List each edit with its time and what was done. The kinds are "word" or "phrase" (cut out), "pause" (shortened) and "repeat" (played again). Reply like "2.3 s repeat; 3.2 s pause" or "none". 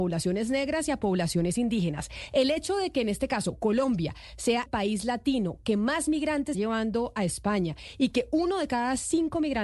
4.7 s word; 6.5 s word